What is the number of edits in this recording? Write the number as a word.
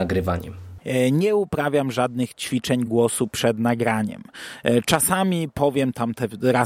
zero